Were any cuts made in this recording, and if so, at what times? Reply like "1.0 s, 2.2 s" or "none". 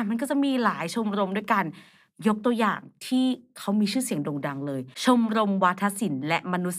4.9 s